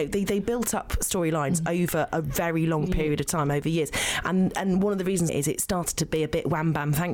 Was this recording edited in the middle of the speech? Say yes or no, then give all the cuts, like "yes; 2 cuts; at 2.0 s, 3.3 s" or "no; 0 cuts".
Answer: yes; 1 cut; at 5.3 s